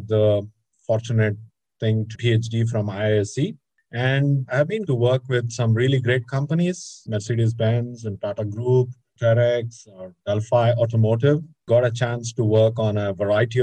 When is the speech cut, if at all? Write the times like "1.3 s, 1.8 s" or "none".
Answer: 2.1 s, 4.4 s, 4.9 s, 7.1 s